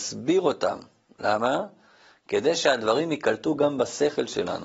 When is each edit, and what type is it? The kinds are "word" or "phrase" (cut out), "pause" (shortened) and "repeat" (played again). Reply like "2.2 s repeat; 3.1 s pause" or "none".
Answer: none